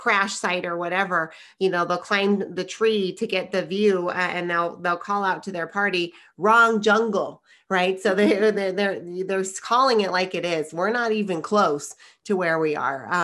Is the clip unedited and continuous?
yes; 0 cuts

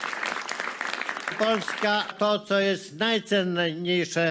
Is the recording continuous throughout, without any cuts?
no; 2 cuts; at 1.3 s, 2.1 s

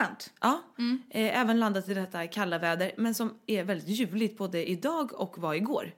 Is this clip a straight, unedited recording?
yes; 0 cuts

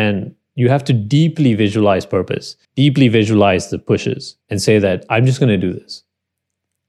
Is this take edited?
yes; 2 cuts; at 2.6 s, 4.4 s

